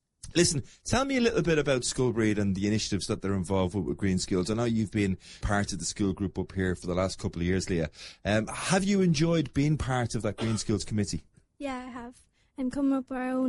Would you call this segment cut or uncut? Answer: cut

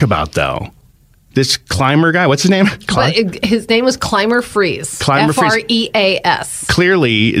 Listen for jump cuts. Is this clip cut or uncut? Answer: uncut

